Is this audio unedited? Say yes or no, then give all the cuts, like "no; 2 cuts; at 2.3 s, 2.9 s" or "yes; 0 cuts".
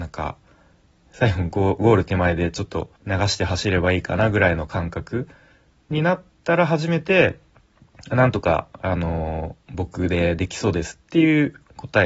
no; 1 cut; at 3.0 s